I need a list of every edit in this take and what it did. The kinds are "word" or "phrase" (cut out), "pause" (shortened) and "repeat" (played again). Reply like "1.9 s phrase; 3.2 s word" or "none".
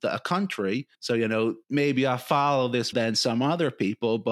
0.9 s pause; 1.6 s pause; 2.9 s word